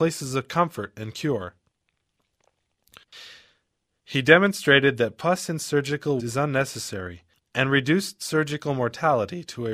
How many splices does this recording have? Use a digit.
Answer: 2